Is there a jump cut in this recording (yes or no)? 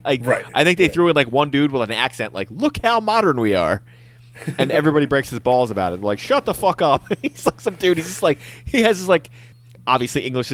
no